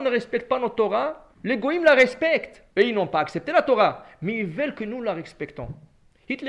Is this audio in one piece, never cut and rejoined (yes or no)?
no